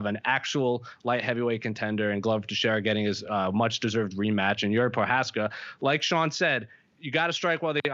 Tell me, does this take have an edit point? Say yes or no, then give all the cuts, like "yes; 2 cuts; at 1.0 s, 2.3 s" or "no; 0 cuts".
no; 0 cuts